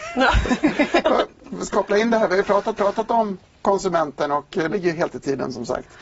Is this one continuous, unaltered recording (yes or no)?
no